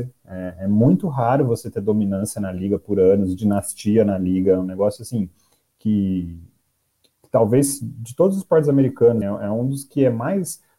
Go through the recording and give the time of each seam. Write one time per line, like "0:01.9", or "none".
0:09.2